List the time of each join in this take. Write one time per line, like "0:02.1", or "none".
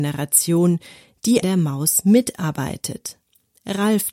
0:01.4